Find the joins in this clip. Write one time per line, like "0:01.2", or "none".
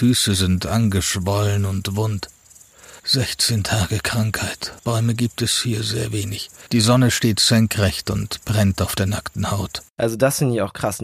0:03.0
0:04.8
0:06.7
0:09.9

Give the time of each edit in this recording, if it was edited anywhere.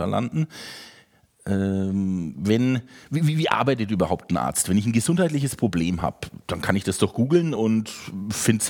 none

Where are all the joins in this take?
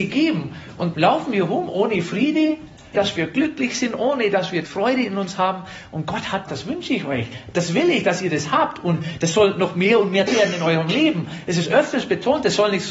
0:00.9
0:02.9
0:04.7
0:06.5
0:10.3

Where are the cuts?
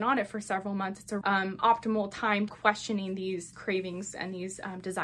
0:01.2
0:02.5
0:03.5

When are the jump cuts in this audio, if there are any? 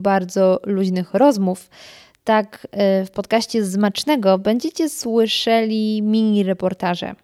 none

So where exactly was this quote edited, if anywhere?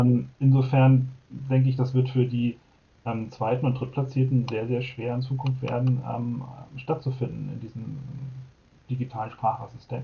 none

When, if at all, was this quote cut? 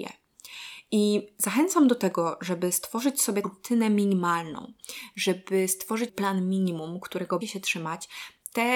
0:03.4
0:06.1
0:07.4

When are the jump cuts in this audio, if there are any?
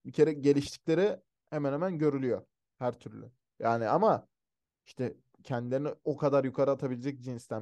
none

